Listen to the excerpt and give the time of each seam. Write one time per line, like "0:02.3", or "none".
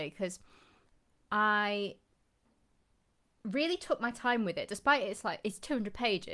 none

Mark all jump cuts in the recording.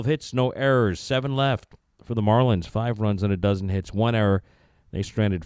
none

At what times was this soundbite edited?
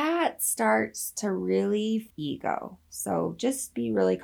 0:02.1

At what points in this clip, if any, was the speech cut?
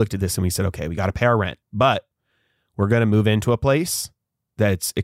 0:01.6

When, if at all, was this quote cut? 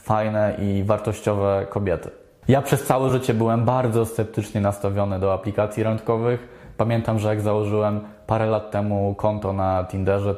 none

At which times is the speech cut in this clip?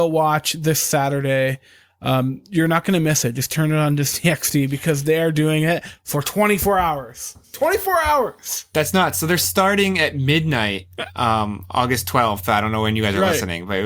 0:07.4

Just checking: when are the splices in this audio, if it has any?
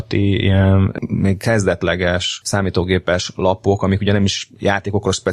none

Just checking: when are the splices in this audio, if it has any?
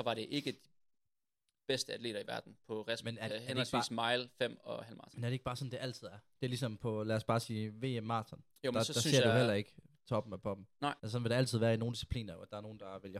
0:03.3
0:11.0

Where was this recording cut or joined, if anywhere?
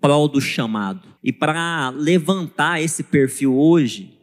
0:01.2

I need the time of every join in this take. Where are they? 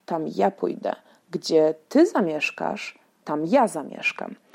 none

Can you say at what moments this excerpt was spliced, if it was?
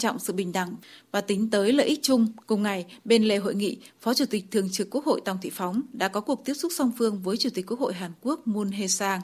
0:02.4

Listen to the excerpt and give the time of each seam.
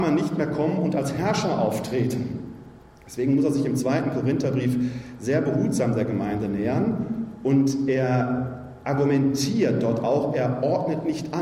none

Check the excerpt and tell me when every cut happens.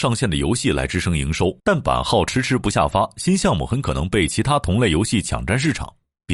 0:01.6

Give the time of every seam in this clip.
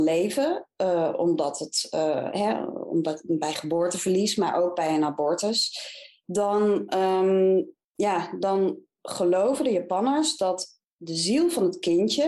0:07.8

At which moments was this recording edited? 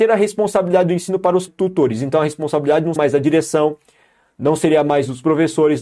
0:01.5
0:03.0

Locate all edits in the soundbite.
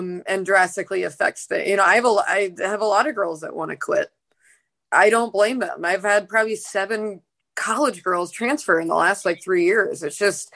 none

